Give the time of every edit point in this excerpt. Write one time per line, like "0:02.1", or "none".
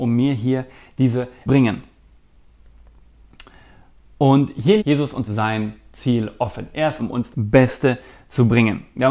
0:01.5
0:04.8
0:05.3
0:07.0
0:07.3